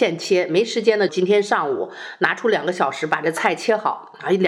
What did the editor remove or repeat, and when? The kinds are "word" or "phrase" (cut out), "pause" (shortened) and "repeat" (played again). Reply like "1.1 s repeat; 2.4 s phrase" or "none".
1.1 s phrase